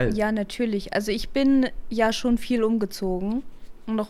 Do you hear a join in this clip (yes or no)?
no